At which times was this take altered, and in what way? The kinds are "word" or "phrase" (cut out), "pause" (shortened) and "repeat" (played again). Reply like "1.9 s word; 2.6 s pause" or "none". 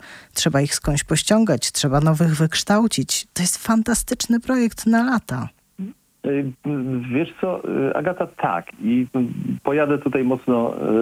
3.3 s pause